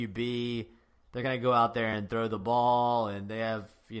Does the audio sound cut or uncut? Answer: uncut